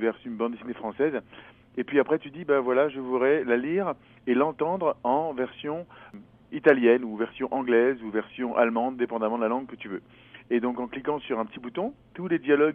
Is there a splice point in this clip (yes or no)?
no